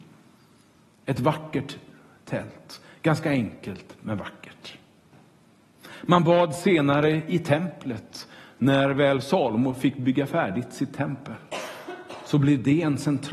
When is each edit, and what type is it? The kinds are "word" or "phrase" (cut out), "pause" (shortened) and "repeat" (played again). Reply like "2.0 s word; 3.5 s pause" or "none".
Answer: none